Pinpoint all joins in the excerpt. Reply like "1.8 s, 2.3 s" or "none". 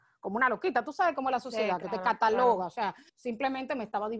3.1 s